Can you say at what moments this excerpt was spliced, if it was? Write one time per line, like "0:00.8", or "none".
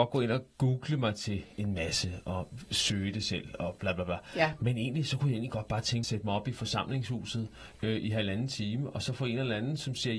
0:06.0